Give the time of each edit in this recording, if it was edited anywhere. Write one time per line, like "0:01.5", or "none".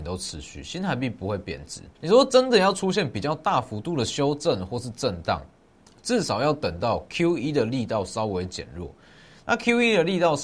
0:01.9